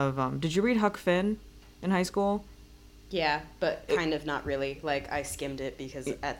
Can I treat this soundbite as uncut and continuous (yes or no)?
yes